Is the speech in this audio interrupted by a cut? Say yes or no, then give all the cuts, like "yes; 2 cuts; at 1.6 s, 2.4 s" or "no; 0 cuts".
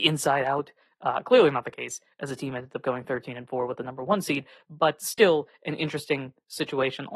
no; 0 cuts